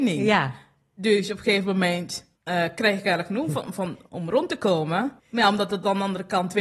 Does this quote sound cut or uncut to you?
cut